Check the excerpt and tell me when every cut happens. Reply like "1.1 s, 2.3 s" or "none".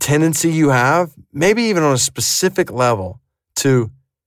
none